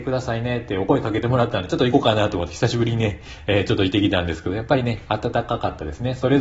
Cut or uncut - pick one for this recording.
uncut